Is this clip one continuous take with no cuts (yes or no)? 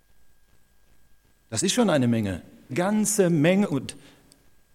no